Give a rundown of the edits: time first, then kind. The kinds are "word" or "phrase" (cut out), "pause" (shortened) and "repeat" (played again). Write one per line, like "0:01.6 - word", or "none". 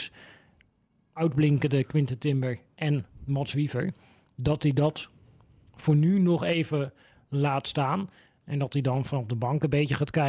none